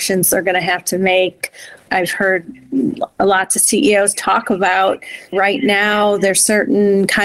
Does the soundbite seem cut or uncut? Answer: uncut